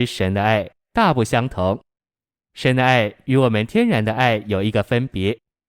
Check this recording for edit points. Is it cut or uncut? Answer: uncut